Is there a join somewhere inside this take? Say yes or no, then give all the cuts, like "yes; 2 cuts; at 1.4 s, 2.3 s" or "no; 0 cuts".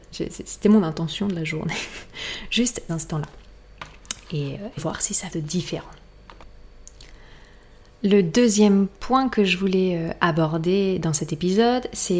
yes; 3 cuts; at 2.9 s, 4.8 s, 5.3 s